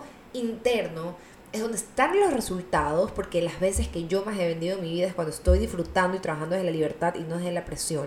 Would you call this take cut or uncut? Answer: uncut